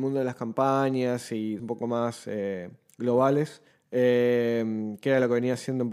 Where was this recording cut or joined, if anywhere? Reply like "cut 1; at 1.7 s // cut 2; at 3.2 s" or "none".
cut 1; at 1.6 s // cut 2; at 3.7 s